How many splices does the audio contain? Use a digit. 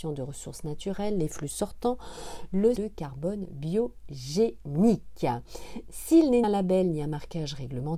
2